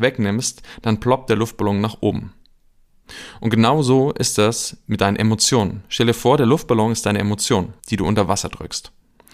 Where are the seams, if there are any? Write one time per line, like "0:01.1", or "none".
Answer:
0:07.8

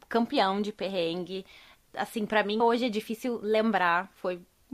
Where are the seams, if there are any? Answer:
0:02.6

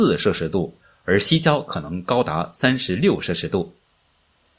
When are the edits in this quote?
none

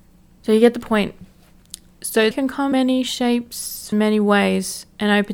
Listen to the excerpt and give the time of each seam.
0:02.3
0:02.7
0:03.9

